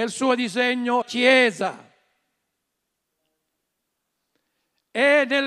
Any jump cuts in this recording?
yes; 1 cut; at 1.0 s

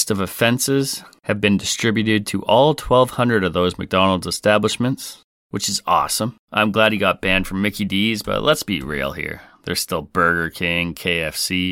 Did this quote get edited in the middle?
yes; 1 cut; at 6.4 s

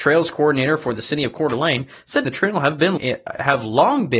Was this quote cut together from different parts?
yes; 2 cuts; at 2.2 s, 3.0 s

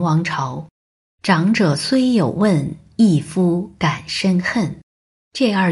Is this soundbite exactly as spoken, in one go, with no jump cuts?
yes; 0 cuts

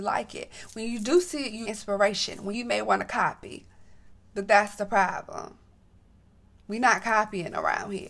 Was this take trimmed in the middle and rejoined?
yes; 3 cuts; at 1.6 s, 2.5 s, 4.1 s

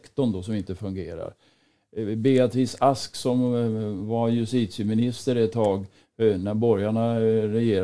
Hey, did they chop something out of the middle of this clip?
no; 0 cuts

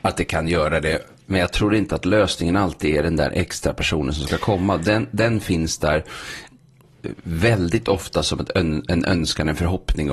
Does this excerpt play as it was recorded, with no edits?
yes; 0 cuts

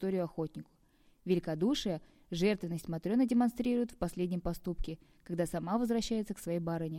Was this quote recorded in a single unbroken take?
yes; 0 cuts

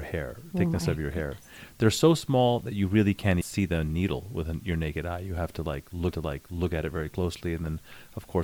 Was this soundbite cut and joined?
yes; 2 cuts; at 3.4 s, 6.1 s

